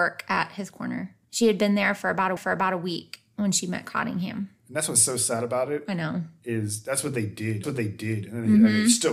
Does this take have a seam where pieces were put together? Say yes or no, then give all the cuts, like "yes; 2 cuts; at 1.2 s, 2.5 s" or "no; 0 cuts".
yes; 3 cuts; at 1.2 s, 2.4 s, 7.6 s